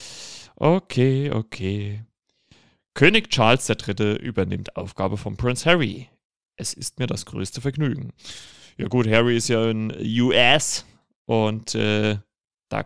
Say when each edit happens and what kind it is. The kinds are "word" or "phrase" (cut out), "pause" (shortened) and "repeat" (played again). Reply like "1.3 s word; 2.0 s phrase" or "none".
none

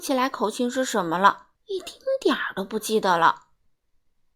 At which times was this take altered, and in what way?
1.5 s pause

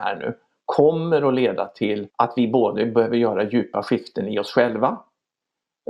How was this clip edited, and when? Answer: 2.1 s pause

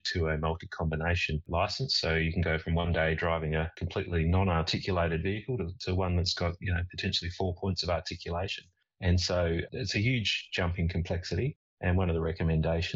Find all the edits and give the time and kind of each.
none

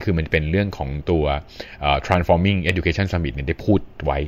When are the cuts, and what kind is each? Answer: none

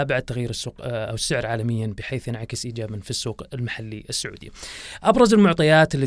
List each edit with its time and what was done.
none

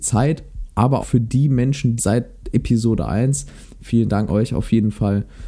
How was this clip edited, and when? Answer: 1.0 s word; 2.0 s phrase; 4.3 s word

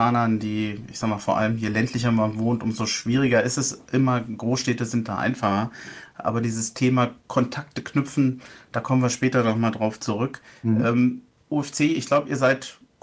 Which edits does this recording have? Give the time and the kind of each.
none

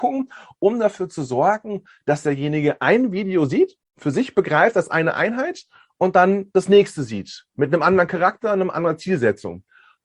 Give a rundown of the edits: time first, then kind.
3.8 s pause

